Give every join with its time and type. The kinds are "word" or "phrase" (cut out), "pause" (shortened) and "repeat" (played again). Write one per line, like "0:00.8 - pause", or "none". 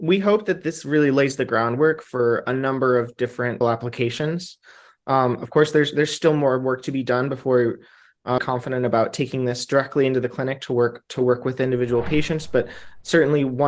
0:03.6 - word
0:08.4 - phrase